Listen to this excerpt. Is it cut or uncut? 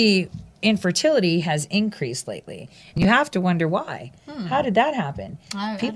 uncut